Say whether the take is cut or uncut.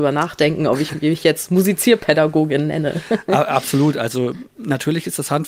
uncut